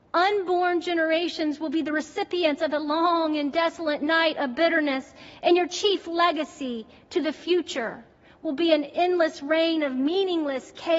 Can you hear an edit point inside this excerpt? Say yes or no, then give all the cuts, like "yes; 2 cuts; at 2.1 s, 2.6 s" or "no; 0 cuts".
no; 0 cuts